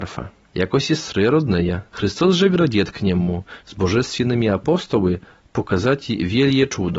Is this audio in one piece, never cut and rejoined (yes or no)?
no